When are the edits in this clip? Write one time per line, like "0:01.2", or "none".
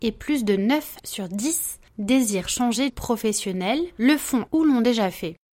0:01.0
0:01.9
0:02.9
0:04.5

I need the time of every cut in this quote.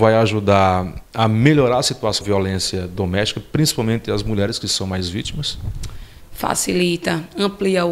0:01.0
0:02.2

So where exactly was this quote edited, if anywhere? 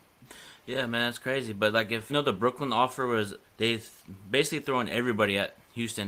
0:02.1
0:03.4

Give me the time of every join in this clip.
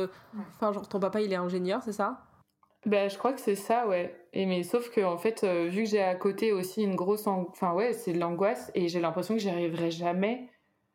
none

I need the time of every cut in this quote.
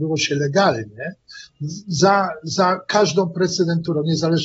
none

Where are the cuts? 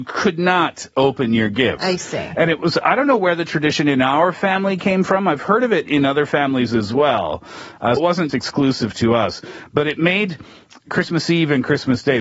0:08.0
0:08.3

